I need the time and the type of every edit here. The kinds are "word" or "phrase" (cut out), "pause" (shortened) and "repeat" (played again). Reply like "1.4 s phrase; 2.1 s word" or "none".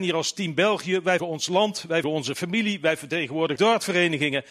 1.2 s word; 2.0 s word; 3.6 s word